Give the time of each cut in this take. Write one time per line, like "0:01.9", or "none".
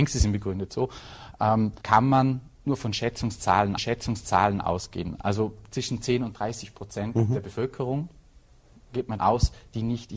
0:01.8
0:02.5
0:03.8
0:09.2